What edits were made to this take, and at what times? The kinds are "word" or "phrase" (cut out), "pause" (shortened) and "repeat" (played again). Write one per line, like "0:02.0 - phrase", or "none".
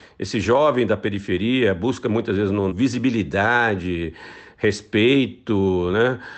0:02.7 - phrase